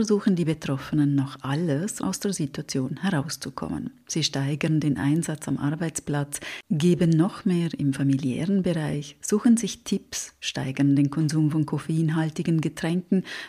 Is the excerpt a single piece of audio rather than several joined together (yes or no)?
no